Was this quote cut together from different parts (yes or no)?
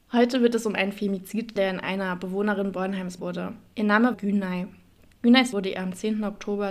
yes